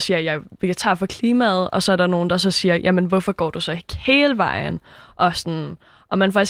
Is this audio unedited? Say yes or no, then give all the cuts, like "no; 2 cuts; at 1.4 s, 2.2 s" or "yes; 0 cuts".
yes; 0 cuts